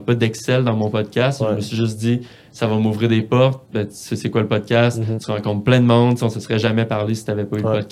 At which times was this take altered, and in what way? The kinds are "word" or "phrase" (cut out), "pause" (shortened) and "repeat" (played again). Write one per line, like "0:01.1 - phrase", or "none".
none

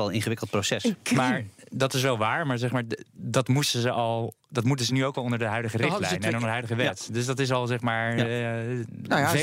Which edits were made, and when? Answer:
none

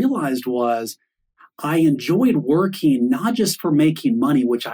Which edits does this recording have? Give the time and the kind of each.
none

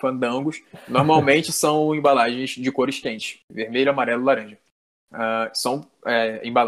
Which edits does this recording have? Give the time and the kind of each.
none

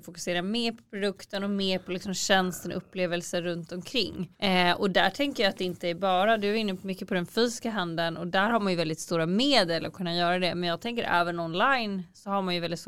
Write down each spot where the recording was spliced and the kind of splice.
0:04.3 - pause

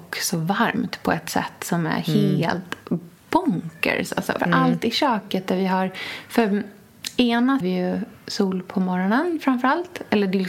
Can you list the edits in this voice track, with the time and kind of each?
0:04.4 - word
0:07.6 - phrase

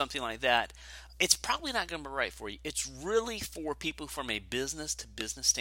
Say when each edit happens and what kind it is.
none

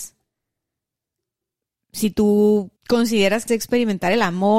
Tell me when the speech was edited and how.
0:02.8 - pause
0:03.5 - word

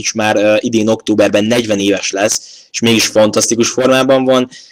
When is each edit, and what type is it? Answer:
none

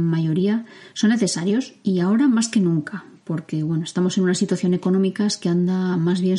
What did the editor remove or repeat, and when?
none

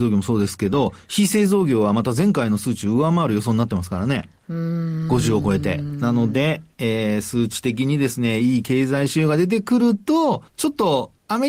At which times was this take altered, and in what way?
0:10.5 - pause

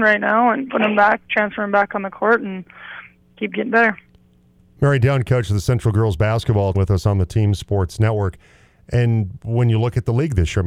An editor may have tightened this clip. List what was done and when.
0:06.7 - word

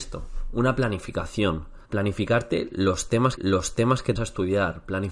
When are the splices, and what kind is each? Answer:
0:01.8 - pause
0:03.4 - repeat
0:04.2 - word

